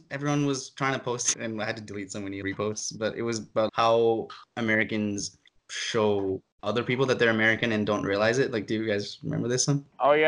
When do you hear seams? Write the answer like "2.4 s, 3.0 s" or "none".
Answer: 1.3 s, 2.4 s, 3.7 s, 5.6 s